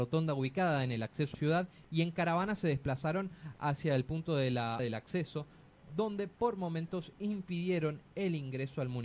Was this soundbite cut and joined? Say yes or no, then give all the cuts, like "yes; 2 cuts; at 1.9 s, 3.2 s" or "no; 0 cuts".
yes; 2 cuts; at 1.3 s, 4.8 s